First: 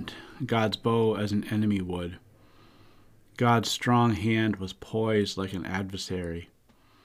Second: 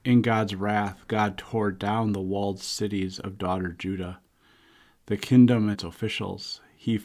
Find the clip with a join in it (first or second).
second